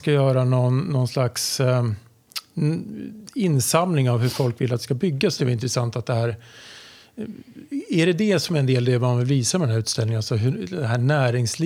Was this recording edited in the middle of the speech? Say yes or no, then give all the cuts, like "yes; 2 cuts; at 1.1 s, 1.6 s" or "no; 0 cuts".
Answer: yes; 1 cut; at 5.4 s